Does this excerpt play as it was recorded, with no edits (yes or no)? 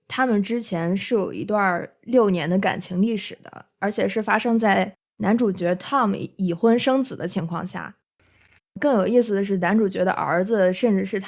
yes